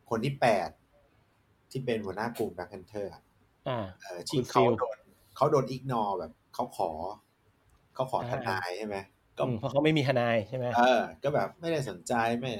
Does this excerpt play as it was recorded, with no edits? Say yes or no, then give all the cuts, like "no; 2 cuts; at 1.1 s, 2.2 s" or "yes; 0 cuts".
yes; 0 cuts